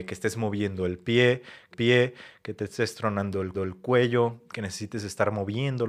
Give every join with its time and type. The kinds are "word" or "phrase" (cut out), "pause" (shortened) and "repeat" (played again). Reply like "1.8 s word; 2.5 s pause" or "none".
1.7 s repeat; 3.5 s repeat